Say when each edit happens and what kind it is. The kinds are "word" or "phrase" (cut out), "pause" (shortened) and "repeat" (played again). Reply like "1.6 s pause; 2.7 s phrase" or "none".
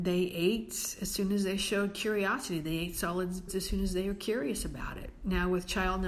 3.5 s word